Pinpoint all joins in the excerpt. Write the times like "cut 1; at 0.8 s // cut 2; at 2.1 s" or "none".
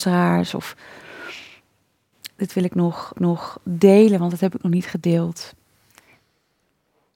cut 1; at 3.1 s